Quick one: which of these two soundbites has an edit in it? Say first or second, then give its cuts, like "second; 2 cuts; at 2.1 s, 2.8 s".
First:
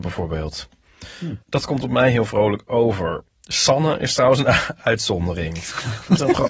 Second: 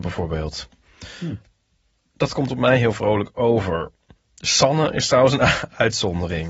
first; 2 cuts; at 1.4 s, 3.3 s